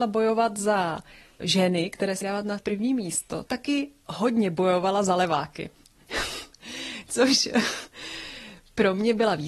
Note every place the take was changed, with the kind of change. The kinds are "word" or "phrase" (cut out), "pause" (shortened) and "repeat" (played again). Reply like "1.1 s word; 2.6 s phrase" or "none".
1.4 s word; 2.2 s word; 2.6 s word; 3.5 s word